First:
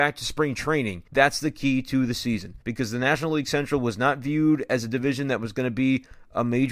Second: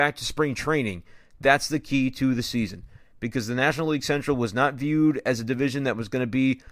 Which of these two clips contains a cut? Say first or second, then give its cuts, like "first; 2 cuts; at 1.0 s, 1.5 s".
first; 2 cuts; at 1.1 s, 2.6 s